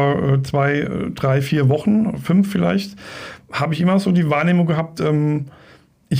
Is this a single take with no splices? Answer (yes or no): yes